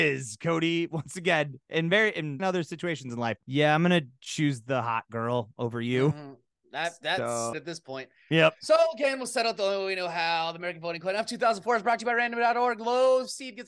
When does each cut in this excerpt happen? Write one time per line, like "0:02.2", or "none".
0:02.4
0:03.4
0:07.5